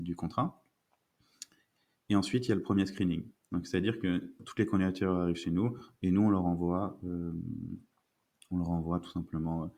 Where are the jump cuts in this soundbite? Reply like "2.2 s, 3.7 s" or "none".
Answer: none

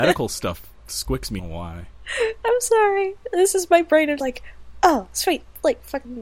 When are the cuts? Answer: 1.4 s, 4.2 s

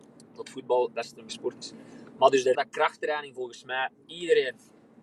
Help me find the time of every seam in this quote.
0.9 s, 1.3 s, 2.5 s, 4.0 s

